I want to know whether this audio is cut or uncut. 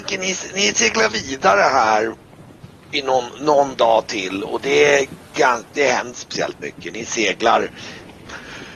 cut